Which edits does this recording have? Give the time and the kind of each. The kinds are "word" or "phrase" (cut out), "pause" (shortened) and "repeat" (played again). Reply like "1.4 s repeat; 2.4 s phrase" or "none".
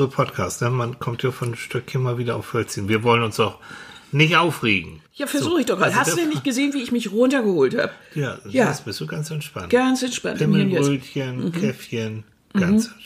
5.1 s pause